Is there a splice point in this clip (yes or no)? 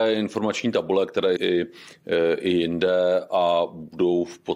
yes